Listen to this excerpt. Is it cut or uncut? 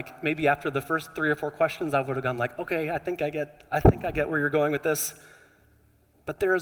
uncut